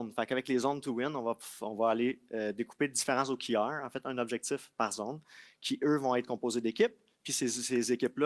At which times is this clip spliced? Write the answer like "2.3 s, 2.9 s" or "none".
none